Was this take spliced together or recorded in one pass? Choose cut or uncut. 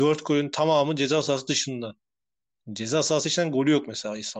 uncut